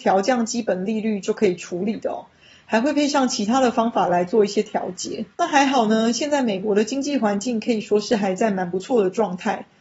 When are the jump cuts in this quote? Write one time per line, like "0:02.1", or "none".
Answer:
0:05.3